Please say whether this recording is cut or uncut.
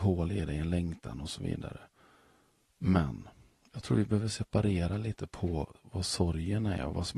uncut